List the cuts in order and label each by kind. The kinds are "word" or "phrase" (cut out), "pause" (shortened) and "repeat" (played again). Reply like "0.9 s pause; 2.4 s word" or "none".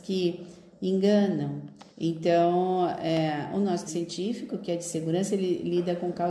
1.9 s pause; 3.9 s word